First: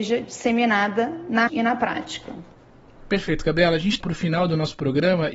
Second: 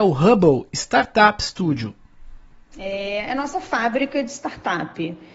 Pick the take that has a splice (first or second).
first